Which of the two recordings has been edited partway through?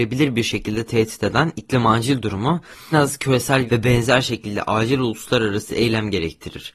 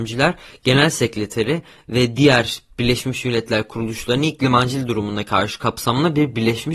first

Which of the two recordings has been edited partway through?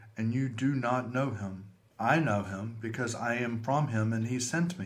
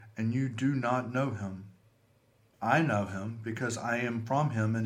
first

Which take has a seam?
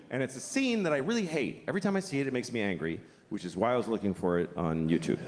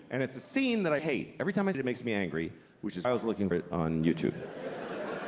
second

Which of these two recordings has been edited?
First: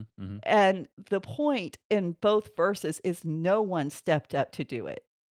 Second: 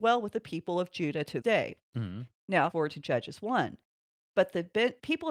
second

